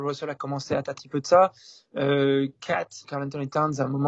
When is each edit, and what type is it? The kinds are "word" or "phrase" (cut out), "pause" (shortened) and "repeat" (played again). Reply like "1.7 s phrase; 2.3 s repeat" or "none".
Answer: 1.0 s word; 3.0 s word